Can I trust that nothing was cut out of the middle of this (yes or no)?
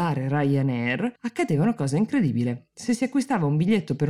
no